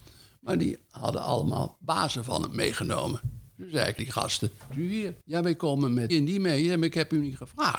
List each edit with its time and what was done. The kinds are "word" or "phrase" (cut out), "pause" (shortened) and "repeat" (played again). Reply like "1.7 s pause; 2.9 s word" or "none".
4.0 s word; 4.7 s phrase; 5.2 s pause; 6.1 s word